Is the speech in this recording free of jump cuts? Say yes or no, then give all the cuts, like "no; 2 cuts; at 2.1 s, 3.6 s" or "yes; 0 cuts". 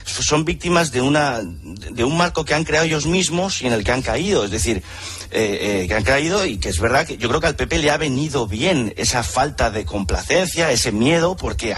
yes; 0 cuts